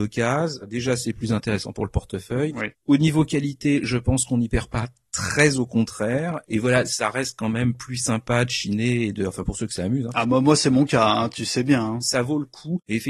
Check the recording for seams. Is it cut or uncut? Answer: uncut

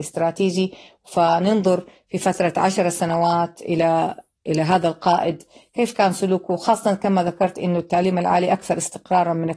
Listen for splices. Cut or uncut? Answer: uncut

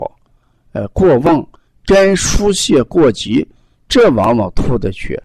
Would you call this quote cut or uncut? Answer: uncut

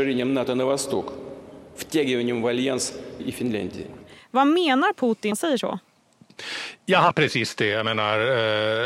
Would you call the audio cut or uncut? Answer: cut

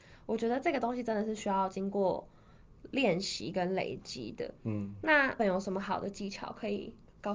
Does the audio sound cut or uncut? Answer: cut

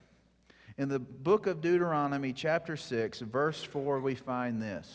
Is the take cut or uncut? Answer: uncut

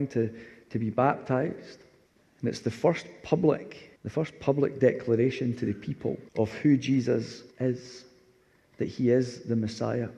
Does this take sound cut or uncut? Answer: cut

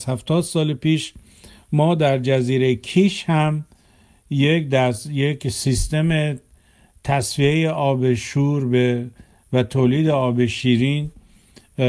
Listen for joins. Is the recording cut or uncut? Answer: uncut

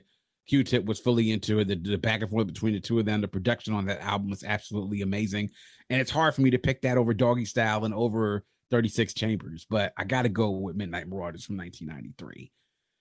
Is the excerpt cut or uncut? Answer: uncut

